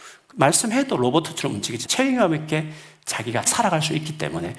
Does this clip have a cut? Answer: yes; 2 cuts; at 1.8 s, 3.5 s

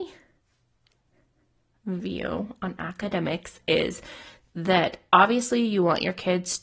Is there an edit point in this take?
no; 0 cuts

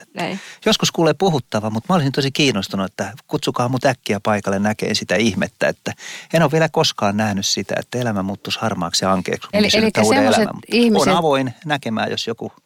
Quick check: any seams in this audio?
yes; 1 cut; at 9.5 s

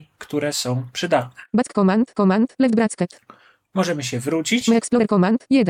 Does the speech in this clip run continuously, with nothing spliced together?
no; 1 cut; at 2.1 s

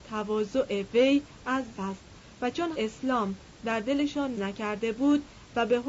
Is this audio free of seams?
no; 3 cuts; at 1.7 s, 2.7 s, 4.3 s

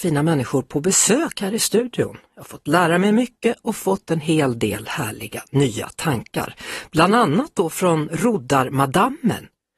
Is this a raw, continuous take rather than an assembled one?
yes; 0 cuts

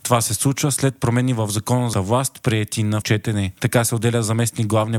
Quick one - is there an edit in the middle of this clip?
yes; 2 cuts; at 1.9 s, 3.0 s

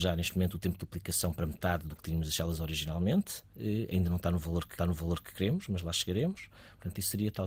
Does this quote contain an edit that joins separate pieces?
yes; 1 cut; at 4.8 s

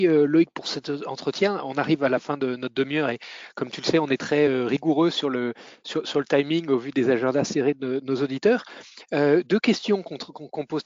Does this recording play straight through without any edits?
yes; 0 cuts

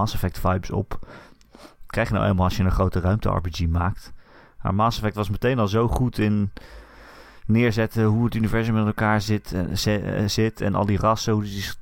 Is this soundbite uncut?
yes; 0 cuts

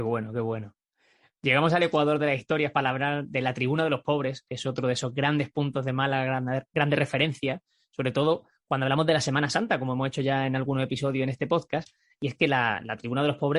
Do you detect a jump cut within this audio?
no; 0 cuts

